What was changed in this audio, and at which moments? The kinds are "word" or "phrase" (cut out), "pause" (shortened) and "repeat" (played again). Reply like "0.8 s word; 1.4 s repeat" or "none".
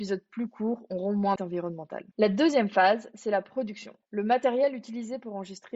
1.4 s word; 2.1 s pause